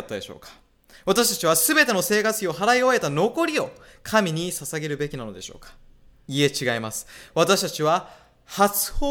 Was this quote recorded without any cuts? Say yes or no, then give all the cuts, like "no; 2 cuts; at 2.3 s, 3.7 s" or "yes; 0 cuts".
yes; 0 cuts